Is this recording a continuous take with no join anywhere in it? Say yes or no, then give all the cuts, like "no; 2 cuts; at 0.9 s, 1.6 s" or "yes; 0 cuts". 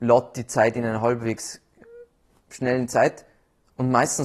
yes; 0 cuts